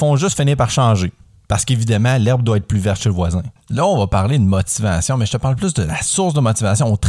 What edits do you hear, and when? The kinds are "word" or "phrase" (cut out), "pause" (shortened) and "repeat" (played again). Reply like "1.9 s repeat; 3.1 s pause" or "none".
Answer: 3.6 s pause